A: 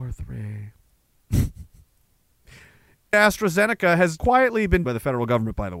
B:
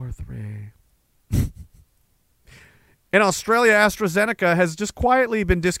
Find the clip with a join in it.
A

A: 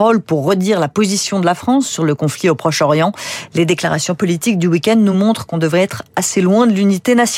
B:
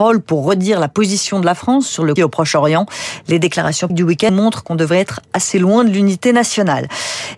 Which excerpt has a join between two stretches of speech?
B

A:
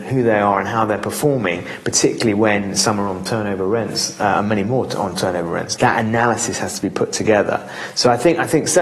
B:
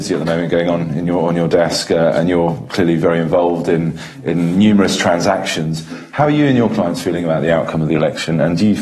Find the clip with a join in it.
A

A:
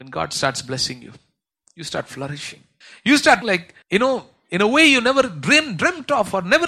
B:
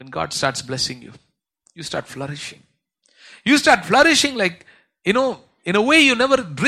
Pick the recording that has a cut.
A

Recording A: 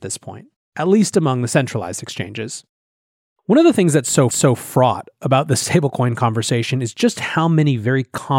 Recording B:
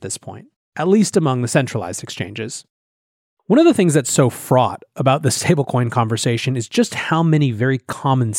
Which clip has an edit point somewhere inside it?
A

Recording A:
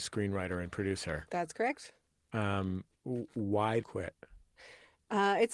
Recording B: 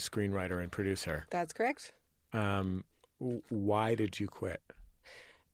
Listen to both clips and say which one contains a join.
A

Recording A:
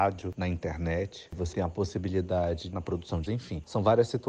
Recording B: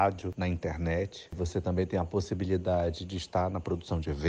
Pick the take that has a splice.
A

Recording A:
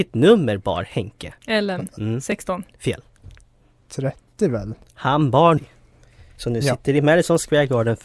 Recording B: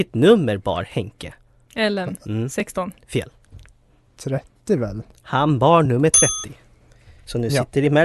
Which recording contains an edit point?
A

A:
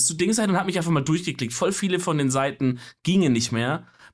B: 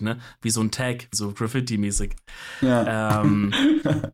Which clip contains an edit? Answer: B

